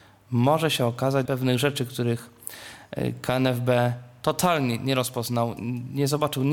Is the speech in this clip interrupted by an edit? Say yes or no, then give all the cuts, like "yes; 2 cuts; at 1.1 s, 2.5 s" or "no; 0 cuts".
yes; 1 cut; at 1.3 s